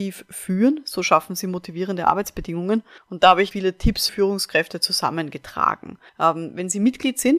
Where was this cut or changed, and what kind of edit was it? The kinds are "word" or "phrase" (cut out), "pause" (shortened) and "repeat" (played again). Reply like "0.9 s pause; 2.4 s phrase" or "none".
3.0 s pause; 3.5 s word; 4.1 s word; 6.1 s pause